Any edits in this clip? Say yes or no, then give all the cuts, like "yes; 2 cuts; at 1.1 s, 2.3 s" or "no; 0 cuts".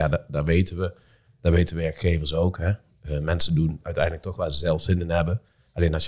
no; 0 cuts